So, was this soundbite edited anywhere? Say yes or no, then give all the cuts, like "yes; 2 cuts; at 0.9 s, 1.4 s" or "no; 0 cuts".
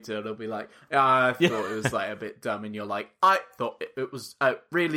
no; 0 cuts